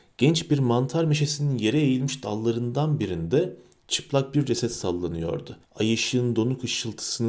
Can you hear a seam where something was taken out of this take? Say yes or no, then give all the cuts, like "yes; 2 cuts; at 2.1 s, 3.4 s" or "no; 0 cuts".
yes; 1 cut; at 5.6 s